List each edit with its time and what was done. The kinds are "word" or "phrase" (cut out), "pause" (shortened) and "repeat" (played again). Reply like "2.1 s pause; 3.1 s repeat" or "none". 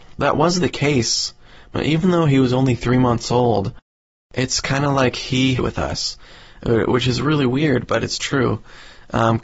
5.6 s phrase